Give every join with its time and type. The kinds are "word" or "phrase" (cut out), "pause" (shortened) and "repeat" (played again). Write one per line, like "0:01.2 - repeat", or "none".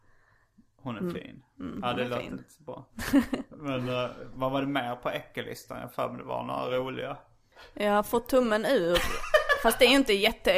none